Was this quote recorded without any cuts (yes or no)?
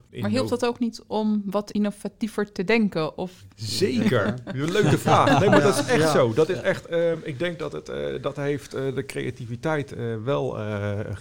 yes